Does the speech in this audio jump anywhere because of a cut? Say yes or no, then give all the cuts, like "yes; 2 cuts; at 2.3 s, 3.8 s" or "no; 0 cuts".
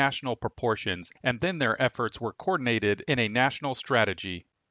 yes; 1 cut; at 1.2 s